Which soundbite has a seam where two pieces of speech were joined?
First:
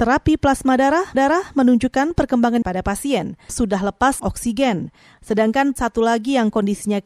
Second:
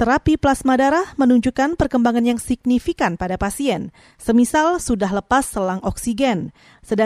first; 5 cuts; at 1.1 s, 2.6 s, 3.5 s, 4.2 s, 5.8 s

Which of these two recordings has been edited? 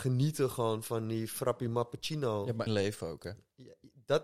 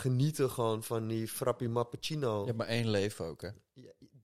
first; 1 cut; at 2.7 s

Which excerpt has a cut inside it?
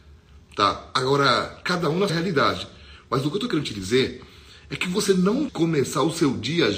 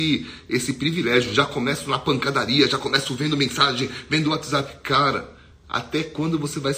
first; 2 cuts; at 2.1 s, 5.5 s

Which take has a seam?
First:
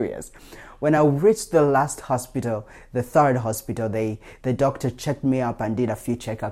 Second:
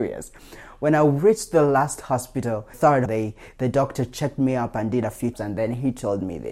second; 3 cuts; at 2.7 s, 3.1 s, 5.3 s

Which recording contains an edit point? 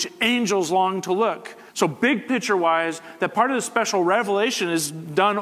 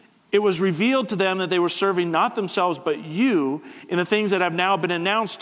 first; 1 cut; at 1.7 s

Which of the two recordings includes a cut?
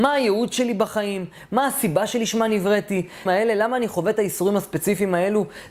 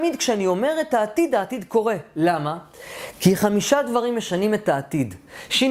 first; 1 cut; at 3.3 s

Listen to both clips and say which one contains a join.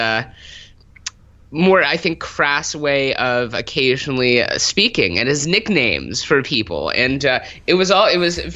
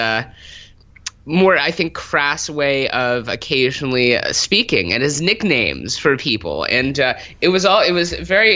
second; 1 cut; at 1.2 s

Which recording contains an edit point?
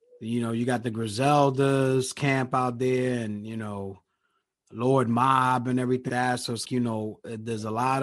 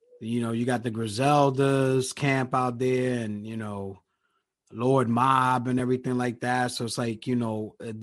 first; 2 cuts; at 6.1 s, 6.6 s

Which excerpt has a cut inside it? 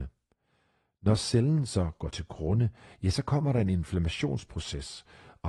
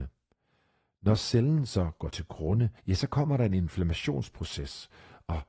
second; 1 cut; at 2.8 s

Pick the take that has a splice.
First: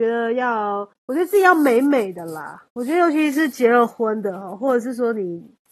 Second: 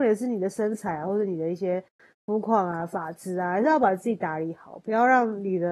first; 1 cut; at 1.0 s

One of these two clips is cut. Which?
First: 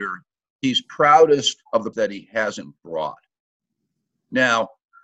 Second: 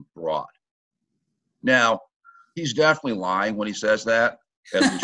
first; 1 cut; at 1.9 s

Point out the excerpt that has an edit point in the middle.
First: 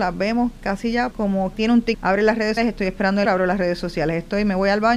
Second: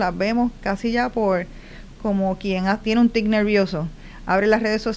first; 5 cuts; at 1.1 s, 1.5 s, 1.9 s, 2.6 s, 3.2 s

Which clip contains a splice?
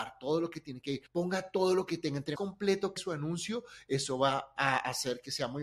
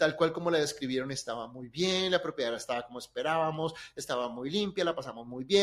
first; 3 cuts; at 1.1 s, 2.4 s, 3.0 s

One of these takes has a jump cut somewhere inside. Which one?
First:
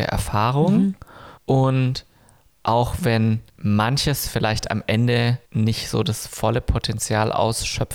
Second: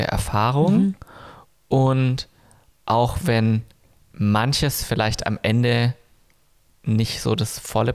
first; 3 cuts; at 1.4 s, 3.5 s, 5.4 s

